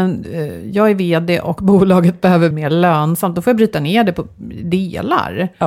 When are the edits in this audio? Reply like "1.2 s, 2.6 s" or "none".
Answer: 2.5 s